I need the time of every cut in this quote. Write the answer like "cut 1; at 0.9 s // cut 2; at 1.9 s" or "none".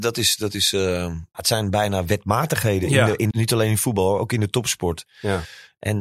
cut 1; at 1.3 s // cut 2; at 3.3 s